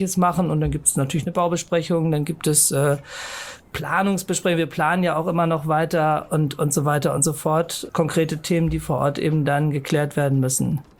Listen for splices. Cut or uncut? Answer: uncut